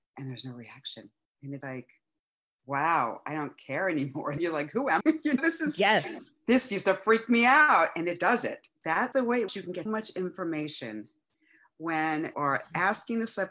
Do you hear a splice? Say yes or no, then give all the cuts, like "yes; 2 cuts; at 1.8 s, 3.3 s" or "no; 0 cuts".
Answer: yes; 8 cuts; at 1.6 s, 4.4 s, 5.0 s, 5.4 s, 9.1 s, 9.5 s, 9.9 s, 12.3 s